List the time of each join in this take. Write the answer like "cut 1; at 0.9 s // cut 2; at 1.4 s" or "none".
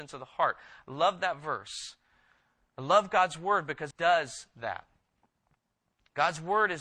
cut 1; at 3.9 s